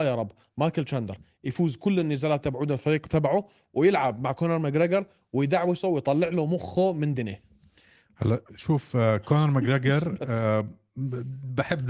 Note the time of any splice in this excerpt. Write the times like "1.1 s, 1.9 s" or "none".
8.5 s